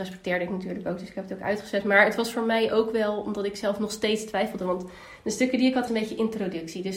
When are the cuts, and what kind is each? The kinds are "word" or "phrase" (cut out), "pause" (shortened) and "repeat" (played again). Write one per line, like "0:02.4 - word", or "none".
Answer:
0:05.9 - phrase